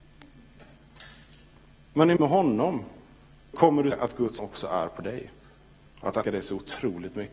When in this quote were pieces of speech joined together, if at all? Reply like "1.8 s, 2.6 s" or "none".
2.2 s, 3.5 s, 3.9 s, 4.4 s, 6.2 s